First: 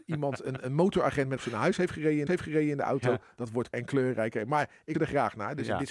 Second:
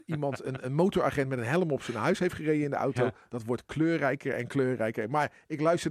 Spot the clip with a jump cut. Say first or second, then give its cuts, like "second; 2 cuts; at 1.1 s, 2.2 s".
first; 4 cuts; at 1.4 s, 2.3 s, 3.7 s, 4.9 s